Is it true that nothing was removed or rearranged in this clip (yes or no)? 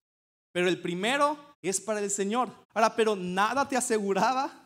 no